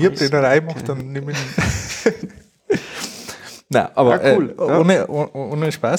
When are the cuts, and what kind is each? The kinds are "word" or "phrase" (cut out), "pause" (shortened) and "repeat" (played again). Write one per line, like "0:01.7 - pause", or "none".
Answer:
none